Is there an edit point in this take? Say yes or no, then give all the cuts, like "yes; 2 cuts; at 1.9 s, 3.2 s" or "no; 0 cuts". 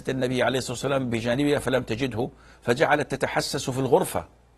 no; 0 cuts